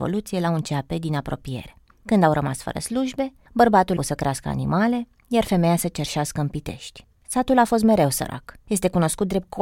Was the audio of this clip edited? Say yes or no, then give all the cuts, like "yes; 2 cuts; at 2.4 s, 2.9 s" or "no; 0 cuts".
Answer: yes; 1 cut; at 4.0 s